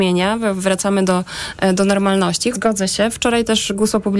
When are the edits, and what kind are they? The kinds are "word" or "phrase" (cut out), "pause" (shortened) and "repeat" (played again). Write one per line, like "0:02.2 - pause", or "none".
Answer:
0:02.5 - word